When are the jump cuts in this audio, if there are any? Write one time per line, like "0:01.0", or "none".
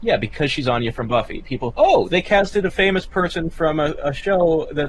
0:01.7